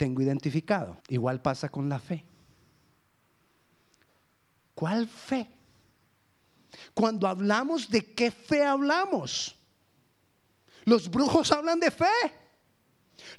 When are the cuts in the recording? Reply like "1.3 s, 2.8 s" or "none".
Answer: 1.0 s